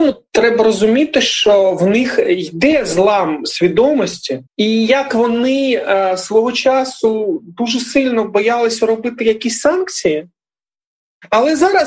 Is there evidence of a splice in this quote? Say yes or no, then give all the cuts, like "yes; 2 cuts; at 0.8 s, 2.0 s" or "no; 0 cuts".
yes; 1 cut; at 4.5 s